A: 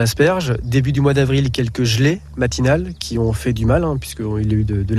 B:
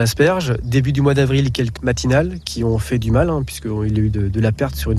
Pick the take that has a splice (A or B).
B